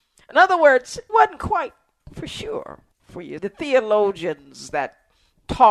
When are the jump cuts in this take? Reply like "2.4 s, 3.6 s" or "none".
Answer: 1.1 s, 2.9 s, 3.4 s